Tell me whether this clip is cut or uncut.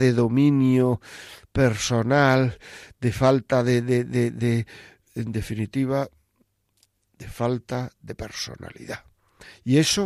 uncut